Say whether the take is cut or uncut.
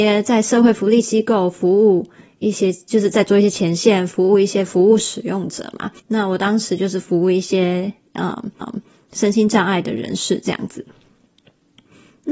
cut